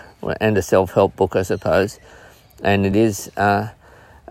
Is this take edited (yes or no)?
no